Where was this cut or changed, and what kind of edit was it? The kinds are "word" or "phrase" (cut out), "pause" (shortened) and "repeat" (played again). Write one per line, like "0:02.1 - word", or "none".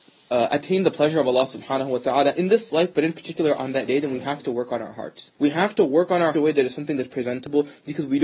0:05.3 - pause
0:06.3 - phrase